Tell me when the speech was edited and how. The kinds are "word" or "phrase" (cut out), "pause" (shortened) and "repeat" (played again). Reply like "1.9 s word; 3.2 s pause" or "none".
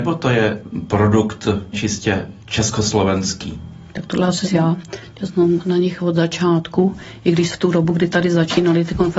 3.9 s pause; 4.4 s phrase; 7.5 s word